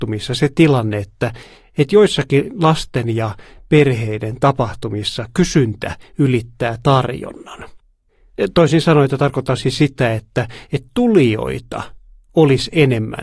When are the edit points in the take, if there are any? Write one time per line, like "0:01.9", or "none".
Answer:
none